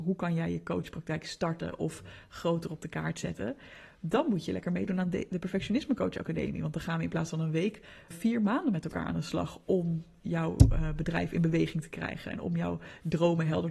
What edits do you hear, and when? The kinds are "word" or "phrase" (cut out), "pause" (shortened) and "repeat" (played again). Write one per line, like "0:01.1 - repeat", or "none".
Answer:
0:08.1 - word